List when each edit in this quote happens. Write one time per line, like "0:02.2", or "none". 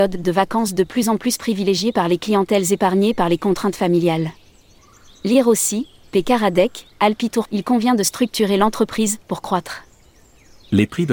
0:07.5